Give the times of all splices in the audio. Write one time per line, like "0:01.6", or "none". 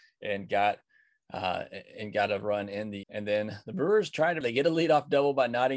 0:03.0
0:04.4